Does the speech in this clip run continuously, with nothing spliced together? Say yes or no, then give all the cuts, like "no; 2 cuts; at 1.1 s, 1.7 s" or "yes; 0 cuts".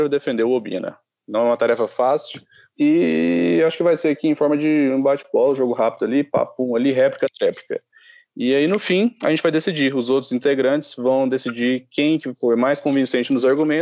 yes; 0 cuts